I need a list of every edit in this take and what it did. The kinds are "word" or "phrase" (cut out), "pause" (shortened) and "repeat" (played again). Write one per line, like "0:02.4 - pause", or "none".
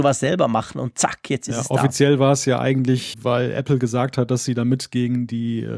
0:03.1 - word